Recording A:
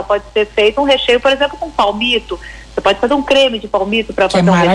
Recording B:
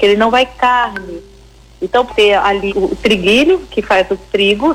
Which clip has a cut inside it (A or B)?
B